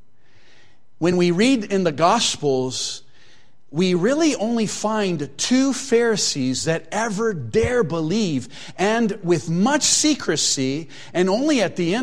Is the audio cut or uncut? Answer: uncut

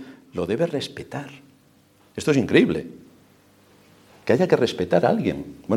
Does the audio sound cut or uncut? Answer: uncut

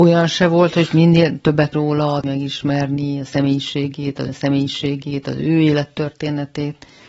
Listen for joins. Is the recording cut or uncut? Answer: cut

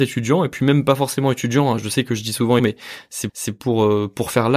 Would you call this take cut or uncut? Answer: cut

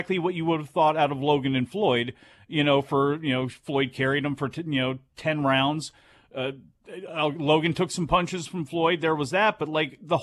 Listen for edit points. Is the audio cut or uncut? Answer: uncut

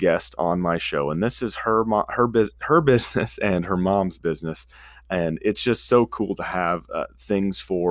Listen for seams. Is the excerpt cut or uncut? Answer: uncut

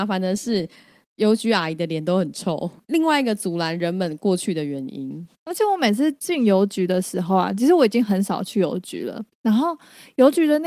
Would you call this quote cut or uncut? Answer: cut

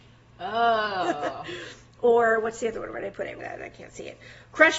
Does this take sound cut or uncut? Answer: cut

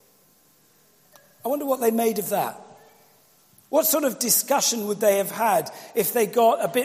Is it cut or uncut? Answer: uncut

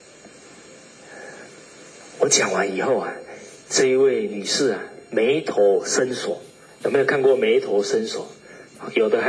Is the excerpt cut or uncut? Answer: cut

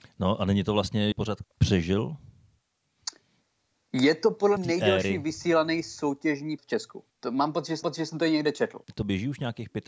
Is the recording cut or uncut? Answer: cut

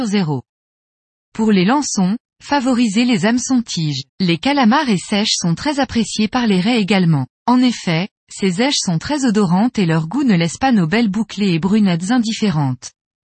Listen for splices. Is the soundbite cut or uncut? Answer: cut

